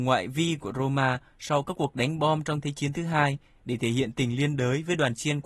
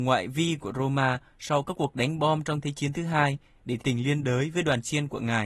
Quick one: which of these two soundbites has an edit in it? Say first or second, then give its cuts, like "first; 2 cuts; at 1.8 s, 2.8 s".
second; 1 cut; at 3.8 s